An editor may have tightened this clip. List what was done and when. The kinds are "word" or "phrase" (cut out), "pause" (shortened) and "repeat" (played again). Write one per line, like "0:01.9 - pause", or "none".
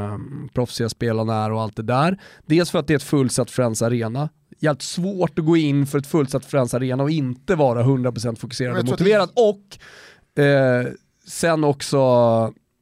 none